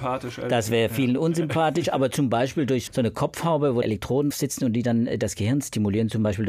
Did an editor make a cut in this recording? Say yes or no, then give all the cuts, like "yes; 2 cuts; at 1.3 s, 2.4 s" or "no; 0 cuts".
yes; 3 cuts; at 2.9 s, 3.8 s, 4.3 s